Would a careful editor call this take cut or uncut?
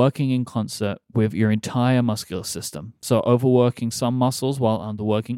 uncut